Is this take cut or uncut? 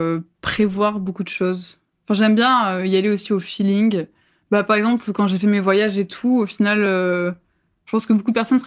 uncut